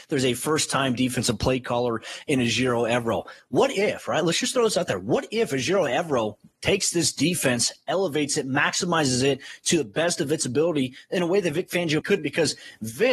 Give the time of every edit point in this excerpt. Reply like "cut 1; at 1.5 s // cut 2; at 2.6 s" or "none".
cut 1; at 12.0 s